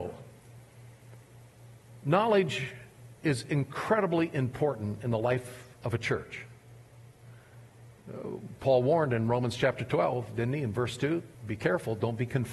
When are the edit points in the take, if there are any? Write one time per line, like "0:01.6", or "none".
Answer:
0:03.2
0:05.8
0:11.3